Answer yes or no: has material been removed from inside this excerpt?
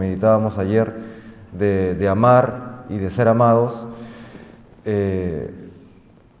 no